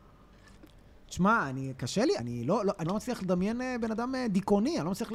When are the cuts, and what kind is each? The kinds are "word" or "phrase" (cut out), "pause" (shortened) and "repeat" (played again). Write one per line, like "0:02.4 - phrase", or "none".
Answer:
0:02.2 - word
0:02.9 - phrase